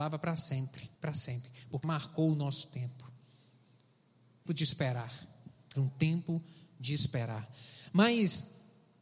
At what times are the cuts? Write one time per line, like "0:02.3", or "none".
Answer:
0:01.0
0:01.8
0:04.5
0:05.7